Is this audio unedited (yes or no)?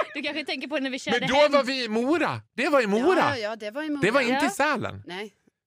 no